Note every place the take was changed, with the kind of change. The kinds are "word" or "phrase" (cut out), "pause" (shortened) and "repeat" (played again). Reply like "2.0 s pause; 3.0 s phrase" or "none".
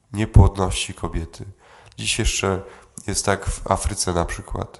none